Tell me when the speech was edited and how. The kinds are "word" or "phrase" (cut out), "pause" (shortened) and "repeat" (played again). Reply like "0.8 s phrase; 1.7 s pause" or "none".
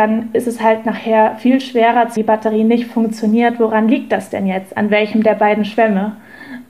2.2 s phrase